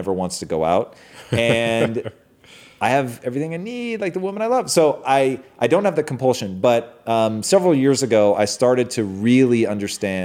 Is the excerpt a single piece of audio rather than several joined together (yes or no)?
yes